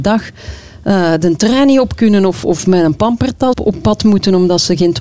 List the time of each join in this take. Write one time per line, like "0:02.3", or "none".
0:02.4
0:03.5